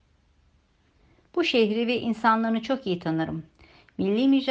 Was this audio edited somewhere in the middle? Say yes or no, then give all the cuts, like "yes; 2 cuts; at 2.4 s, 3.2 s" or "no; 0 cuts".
no; 0 cuts